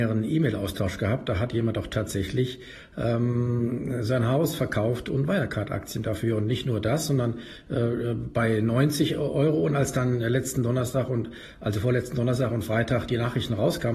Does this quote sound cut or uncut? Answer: uncut